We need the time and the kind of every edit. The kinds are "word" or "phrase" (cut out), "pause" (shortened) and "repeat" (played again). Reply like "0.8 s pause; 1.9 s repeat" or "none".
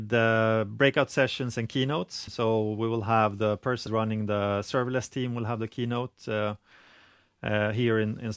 2.3 s word; 3.9 s phrase